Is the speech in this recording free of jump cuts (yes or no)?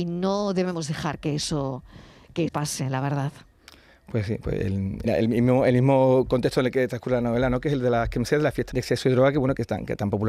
no